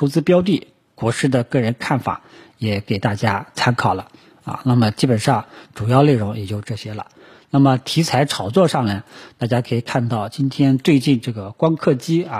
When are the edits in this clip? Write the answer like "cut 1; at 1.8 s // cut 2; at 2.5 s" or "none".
none